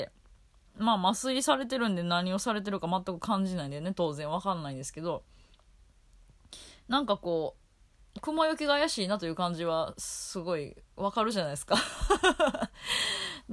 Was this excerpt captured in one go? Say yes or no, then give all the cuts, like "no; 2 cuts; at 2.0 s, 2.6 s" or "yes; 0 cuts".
yes; 0 cuts